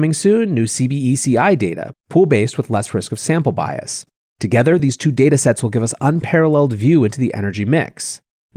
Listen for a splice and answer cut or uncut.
uncut